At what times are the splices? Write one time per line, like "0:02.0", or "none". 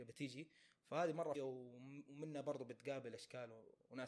0:01.3